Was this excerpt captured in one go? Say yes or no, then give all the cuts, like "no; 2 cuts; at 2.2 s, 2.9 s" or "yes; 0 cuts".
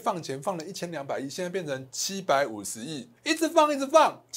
no; 1 cut; at 3.2 s